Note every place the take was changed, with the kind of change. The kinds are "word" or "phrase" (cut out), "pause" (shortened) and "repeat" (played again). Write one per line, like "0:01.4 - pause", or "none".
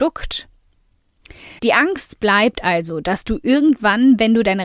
0:01.6 - pause